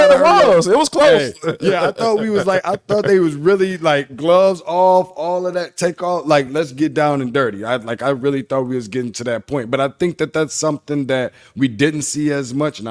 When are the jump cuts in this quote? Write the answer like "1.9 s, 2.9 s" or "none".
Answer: none